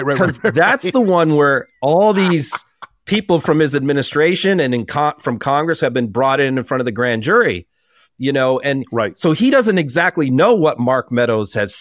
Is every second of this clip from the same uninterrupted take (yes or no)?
yes